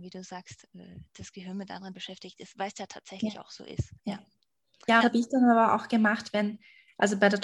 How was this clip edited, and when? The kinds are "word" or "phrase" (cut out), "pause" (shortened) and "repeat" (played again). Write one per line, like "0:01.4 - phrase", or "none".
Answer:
0:01.9 - word
0:04.0 - pause
0:05.0 - phrase